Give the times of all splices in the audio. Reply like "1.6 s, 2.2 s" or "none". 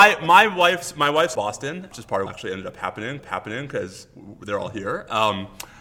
1.3 s, 1.9 s, 2.3 s, 3.2 s